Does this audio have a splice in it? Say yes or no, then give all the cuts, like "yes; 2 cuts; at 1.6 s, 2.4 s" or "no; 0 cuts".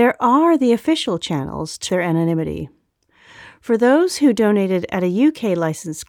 yes; 1 cut; at 1.9 s